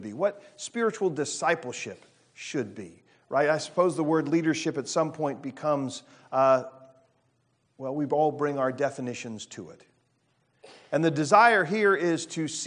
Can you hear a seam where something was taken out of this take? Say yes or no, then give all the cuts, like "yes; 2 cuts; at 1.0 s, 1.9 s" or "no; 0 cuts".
no; 0 cuts